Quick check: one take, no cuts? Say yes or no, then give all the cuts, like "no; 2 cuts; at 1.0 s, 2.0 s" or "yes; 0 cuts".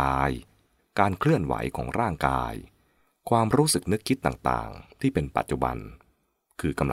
yes; 0 cuts